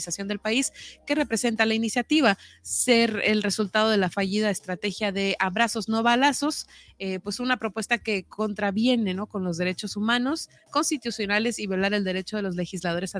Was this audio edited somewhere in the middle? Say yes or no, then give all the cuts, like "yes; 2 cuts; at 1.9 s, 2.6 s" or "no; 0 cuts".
no; 0 cuts